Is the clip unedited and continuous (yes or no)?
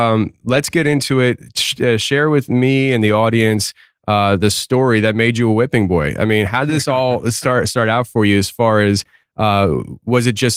yes